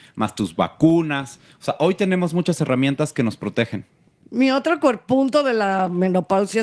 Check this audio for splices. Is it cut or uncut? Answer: uncut